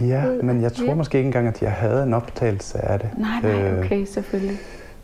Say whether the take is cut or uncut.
uncut